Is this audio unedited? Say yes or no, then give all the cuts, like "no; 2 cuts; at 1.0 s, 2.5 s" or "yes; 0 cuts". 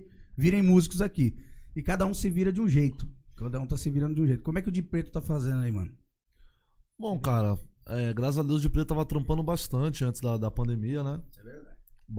yes; 0 cuts